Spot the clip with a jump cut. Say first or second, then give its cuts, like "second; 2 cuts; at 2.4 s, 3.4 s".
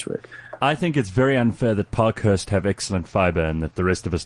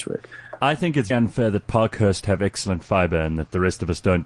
second; 1 cut; at 1.1 s